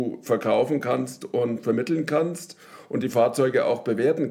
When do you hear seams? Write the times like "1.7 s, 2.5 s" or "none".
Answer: none